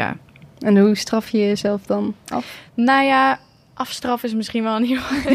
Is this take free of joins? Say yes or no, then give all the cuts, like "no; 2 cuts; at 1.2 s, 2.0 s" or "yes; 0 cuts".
yes; 0 cuts